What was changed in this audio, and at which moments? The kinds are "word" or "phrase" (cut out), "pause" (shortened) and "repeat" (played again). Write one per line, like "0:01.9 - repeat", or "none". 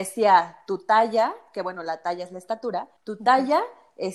0:03.0 - pause